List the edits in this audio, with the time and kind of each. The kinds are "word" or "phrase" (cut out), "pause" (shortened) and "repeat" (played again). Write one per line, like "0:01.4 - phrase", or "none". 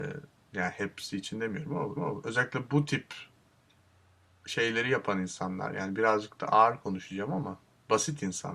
0:02.0 - repeat